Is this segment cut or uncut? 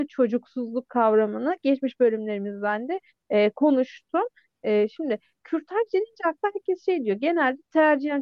uncut